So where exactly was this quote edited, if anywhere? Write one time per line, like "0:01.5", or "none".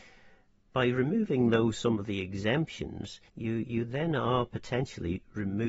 0:03.3